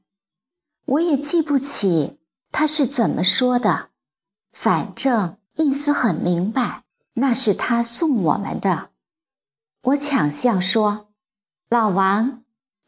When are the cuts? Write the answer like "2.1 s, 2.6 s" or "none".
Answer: 5.5 s, 6.9 s

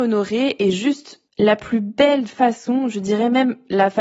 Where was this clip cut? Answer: 1.3 s

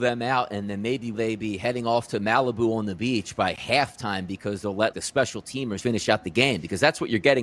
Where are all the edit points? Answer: 1.1 s, 4.9 s, 5.8 s

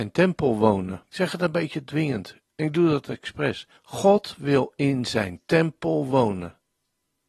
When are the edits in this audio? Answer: 1.1 s, 3.8 s

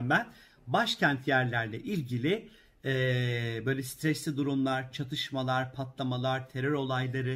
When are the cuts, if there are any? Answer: none

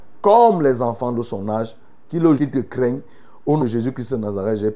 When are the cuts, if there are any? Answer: 2.4 s, 3.6 s

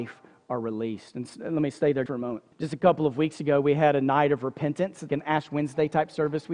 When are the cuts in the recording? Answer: 2.1 s, 2.5 s, 5.1 s

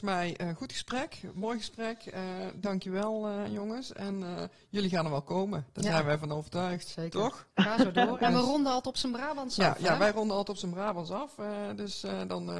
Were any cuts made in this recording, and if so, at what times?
7.5 s

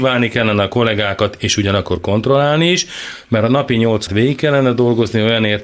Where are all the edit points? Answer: 4.1 s

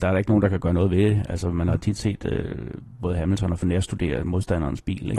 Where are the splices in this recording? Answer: 3.6 s

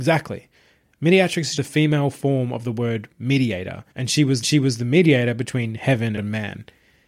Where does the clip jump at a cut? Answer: 1.6 s, 3.9 s, 4.4 s, 6.2 s

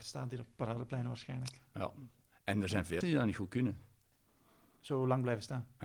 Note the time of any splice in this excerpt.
3.0 s

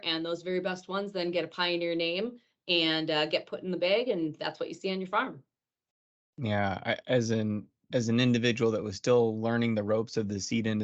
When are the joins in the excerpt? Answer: none

